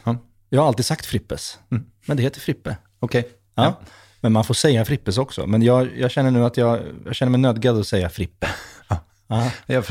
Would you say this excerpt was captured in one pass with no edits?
yes; 0 cuts

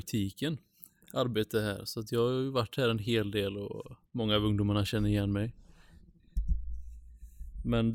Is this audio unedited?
no; 1 cut; at 4.1 s

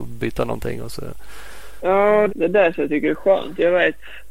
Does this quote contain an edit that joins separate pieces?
yes; 1 cut; at 2.3 s

